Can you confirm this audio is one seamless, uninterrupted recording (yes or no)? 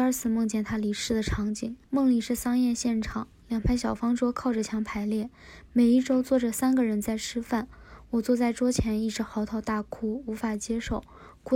no